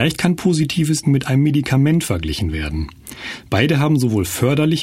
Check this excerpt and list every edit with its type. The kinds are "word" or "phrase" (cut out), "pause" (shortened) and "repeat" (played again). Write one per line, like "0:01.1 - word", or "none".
0:01.0 - word

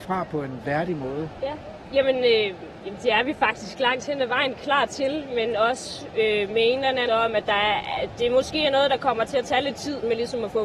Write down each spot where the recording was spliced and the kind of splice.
0:07.1 - word

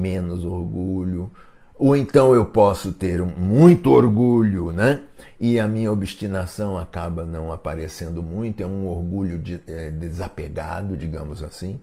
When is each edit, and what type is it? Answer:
none

